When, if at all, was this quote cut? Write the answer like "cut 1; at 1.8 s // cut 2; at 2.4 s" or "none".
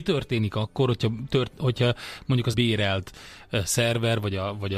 cut 1; at 2.5 s